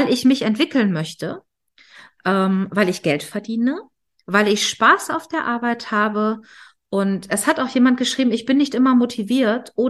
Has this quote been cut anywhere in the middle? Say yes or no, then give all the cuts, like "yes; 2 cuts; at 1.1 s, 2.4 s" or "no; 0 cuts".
no; 0 cuts